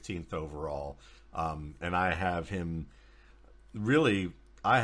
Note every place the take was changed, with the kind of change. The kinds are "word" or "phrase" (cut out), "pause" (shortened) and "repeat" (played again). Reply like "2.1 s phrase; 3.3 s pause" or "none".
none